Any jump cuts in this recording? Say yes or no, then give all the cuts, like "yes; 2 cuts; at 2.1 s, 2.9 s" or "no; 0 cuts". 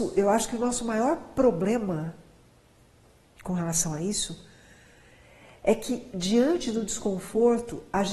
no; 0 cuts